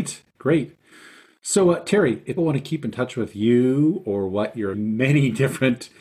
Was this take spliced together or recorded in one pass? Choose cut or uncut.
cut